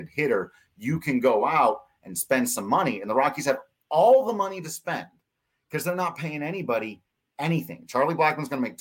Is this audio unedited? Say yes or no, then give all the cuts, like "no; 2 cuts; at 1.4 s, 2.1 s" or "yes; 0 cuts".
yes; 0 cuts